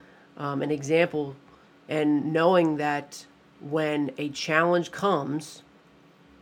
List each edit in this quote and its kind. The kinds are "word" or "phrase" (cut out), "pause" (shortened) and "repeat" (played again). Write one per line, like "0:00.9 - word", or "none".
none